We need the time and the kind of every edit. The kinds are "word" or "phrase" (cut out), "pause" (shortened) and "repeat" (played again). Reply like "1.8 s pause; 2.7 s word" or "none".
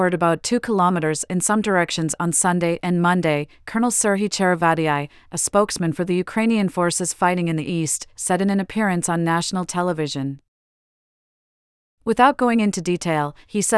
none